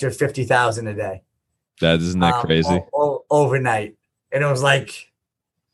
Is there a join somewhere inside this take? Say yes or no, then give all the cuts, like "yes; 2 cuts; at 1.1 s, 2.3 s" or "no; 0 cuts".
no; 0 cuts